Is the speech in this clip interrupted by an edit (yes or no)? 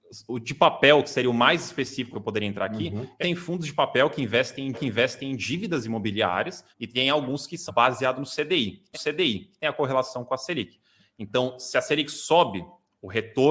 yes